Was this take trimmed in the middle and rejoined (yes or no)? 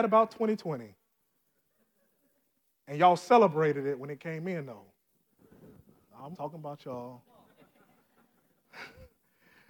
yes